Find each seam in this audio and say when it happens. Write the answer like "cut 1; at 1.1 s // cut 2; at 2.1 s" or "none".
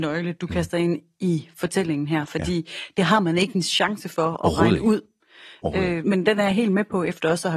cut 1; at 6.0 s